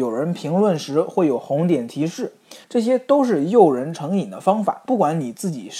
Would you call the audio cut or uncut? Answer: cut